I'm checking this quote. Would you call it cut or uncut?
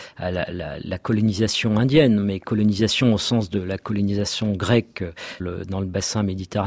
cut